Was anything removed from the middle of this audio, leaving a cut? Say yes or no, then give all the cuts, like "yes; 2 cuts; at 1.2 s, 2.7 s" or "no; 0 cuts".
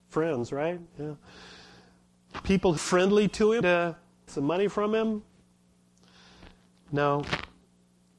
yes; 3 cuts; at 2.8 s, 3.6 s, 4.3 s